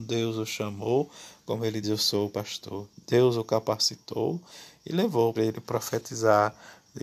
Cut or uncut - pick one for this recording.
cut